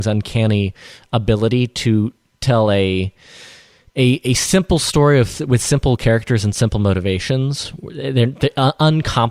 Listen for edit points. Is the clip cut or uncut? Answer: uncut